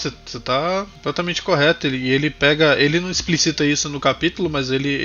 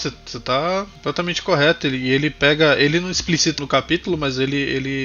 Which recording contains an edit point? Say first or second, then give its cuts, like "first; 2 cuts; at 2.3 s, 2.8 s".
second; 1 cut; at 3.6 s